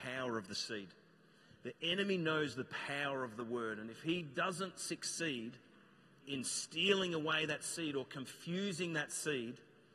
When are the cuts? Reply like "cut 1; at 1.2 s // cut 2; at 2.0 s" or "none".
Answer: cut 1; at 6.2 s